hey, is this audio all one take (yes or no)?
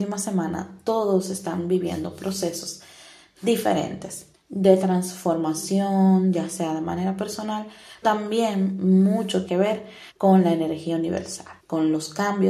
no